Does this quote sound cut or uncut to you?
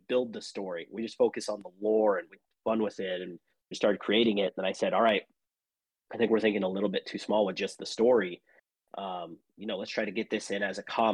uncut